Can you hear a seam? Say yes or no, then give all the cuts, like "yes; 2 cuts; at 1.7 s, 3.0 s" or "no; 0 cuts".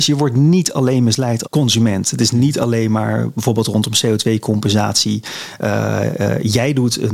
yes; 1 cut; at 1.5 s